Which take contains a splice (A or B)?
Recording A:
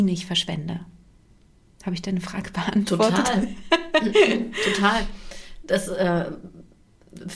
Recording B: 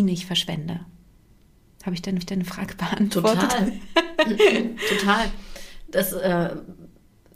B